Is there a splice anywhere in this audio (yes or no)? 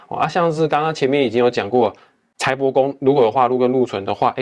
no